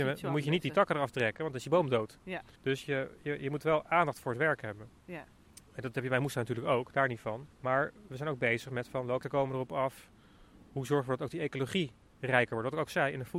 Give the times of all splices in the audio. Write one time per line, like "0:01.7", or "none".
0:02.6
0:07.5
0:09.2